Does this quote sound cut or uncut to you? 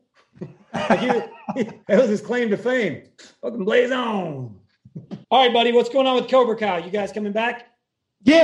cut